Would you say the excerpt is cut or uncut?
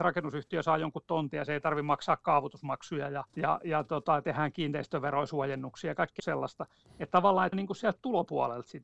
cut